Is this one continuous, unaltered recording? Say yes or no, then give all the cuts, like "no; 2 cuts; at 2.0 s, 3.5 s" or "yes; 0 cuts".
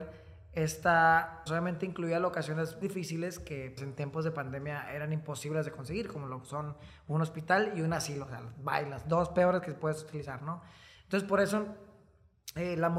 no; 3 cuts; at 1.5 s, 2.8 s, 3.8 s